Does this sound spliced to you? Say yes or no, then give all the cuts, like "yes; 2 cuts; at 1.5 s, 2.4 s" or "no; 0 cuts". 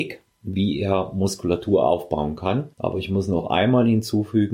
yes; 1 cut; at 2.7 s